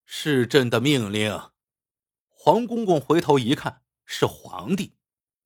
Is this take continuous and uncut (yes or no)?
no